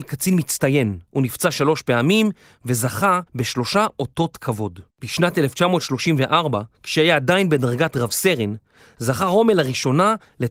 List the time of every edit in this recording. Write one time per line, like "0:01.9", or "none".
0:01.1
0:03.3
0:04.9
0:06.7